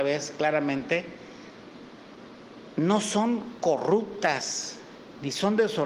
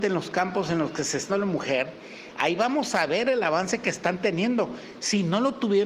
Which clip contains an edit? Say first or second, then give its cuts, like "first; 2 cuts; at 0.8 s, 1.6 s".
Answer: second; 1 cut; at 1.3 s